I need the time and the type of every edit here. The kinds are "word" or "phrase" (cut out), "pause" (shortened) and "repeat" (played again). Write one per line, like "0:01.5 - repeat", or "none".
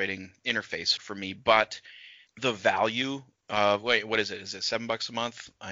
0:01.0 - word